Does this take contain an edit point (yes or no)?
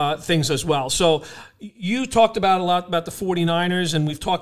no